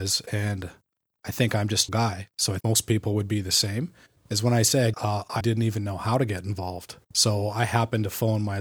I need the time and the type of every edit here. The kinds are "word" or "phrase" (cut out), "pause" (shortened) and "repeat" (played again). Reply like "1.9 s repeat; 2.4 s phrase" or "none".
1.9 s phrase; 2.6 s word; 4.2 s pause; 4.9 s phrase; 5.4 s word; 7.0 s pause